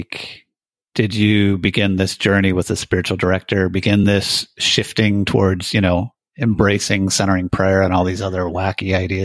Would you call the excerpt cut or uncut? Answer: uncut